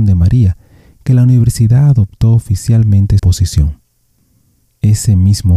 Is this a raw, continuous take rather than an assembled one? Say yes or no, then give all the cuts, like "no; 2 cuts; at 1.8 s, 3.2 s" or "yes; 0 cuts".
no; 1 cut; at 3.2 s